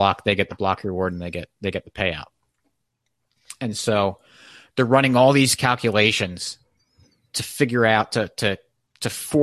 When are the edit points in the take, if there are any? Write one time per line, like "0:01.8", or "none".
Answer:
none